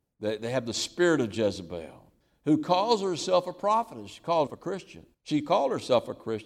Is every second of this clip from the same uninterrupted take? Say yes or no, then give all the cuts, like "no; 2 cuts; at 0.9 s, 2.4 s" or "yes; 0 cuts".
no; 3 cuts; at 2.2 s, 4.5 s, 5.1 s